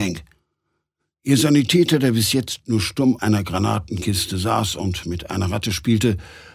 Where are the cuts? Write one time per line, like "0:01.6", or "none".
0:03.2